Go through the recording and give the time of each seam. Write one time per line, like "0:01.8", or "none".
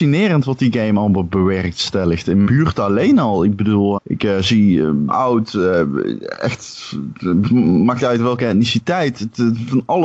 0:02.5
0:04.0
0:05.1
0:07.4
0:08.0